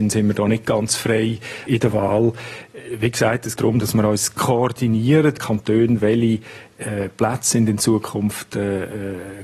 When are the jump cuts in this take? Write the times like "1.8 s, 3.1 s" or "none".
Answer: 1.7 s, 3.6 s, 5.4 s